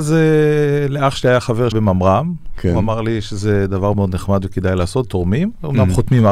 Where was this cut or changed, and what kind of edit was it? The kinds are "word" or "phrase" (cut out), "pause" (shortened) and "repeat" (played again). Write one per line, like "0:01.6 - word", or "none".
0:01.7 - word
0:03.9 - word
0:05.0 - word

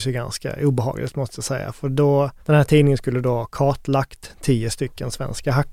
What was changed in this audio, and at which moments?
0:02.4 - pause

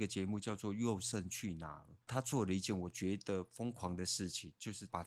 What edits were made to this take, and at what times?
0:02.0 - pause

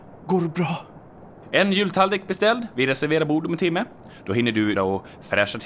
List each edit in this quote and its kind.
0:04.8 - word

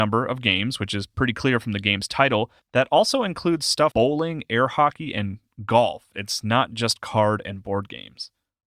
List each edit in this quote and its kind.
0:02.6 - pause
0:03.9 - word

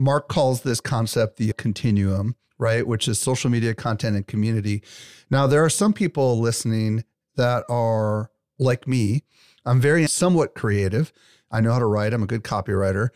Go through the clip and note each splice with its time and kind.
0:01.5 - word
0:10.1 - phrase

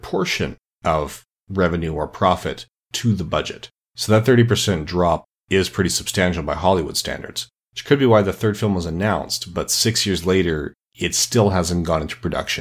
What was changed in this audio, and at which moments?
none

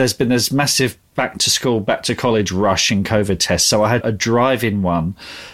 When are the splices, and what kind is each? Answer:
0:04.0 - phrase

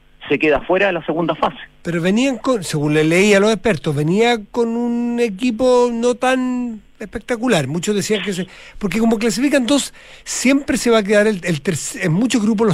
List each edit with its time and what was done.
0:06.9 - pause

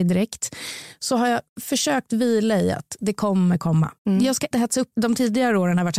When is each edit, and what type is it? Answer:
0:01.5 - pause
0:04.0 - pause
0:04.5 - word
0:04.9 - phrase

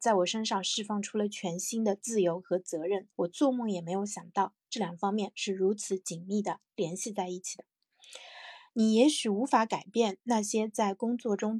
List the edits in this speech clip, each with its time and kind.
0:03.1 - pause

